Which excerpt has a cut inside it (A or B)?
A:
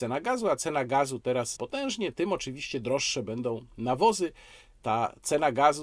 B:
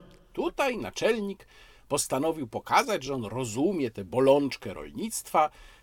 A